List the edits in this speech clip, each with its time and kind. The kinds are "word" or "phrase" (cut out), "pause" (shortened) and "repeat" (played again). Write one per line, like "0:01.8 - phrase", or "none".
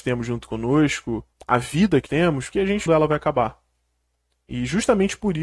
0:01.3 - pause
0:02.1 - word
0:02.5 - word
0:02.9 - phrase